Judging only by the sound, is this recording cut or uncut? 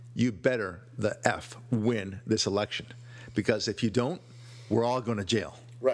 uncut